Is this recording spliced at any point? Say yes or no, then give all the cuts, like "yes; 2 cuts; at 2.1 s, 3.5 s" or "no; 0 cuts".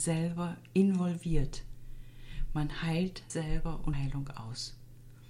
yes; 2 cuts; at 3.3 s, 3.9 s